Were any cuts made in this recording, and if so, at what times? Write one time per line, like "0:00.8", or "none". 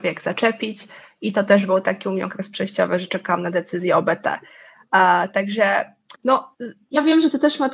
0:06.2

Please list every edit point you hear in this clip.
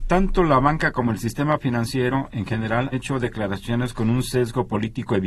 0:02.9

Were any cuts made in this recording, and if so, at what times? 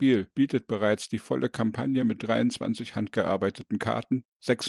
none

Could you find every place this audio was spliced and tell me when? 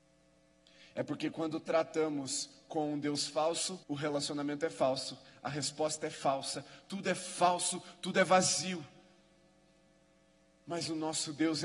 0:03.8

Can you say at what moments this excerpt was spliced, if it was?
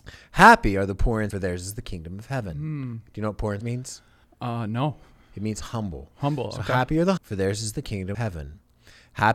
0:01.3
0:03.6
0:04.2
0:07.2
0:08.1

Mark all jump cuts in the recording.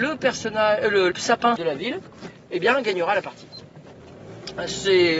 0:01.1
0:01.6

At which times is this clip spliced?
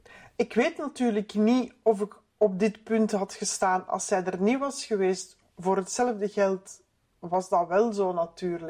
0:02.3

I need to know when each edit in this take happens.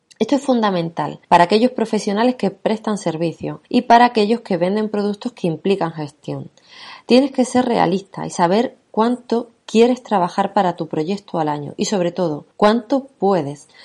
0:01.2
0:03.6
0:12.5

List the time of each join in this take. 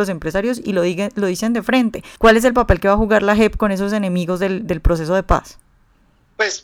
0:02.2

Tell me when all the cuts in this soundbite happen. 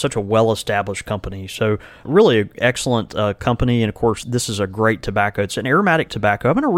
0:04.2

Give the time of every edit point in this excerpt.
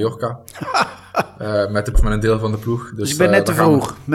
0:01.9

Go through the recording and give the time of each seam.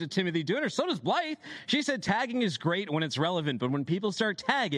none

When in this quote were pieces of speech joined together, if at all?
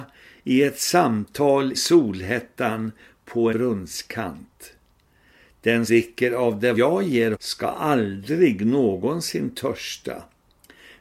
0:01.7
0:03.5
0:05.9
0:06.7
0:07.3

